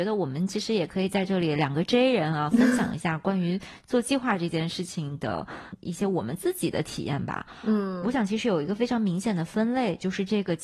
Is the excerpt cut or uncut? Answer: uncut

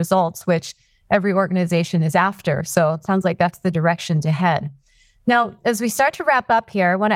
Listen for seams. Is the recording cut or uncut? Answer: uncut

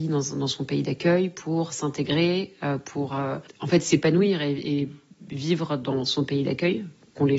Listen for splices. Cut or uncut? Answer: uncut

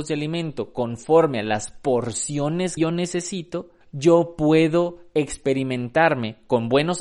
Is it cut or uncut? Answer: cut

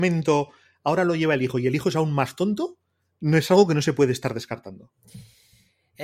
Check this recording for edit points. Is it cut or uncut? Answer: uncut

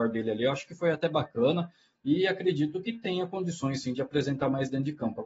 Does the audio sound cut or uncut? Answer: uncut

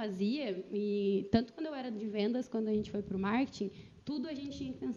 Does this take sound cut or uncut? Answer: uncut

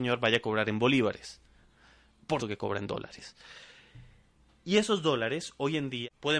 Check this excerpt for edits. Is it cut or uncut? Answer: cut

